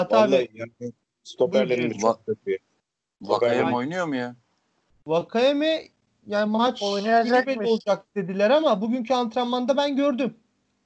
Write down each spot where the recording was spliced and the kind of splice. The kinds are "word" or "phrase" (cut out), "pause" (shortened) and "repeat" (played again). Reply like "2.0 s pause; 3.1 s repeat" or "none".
none